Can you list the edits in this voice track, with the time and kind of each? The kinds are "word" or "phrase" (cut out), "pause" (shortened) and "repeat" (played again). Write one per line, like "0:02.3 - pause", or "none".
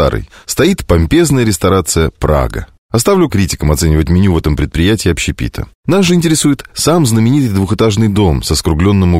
0:03.3 - word